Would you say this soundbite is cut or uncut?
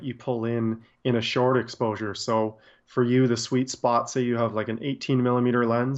uncut